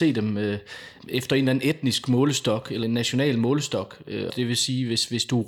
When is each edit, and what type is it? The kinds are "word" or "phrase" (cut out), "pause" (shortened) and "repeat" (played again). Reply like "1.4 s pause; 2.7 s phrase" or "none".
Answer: 1.0 s word; 2.8 s word; 4.3 s word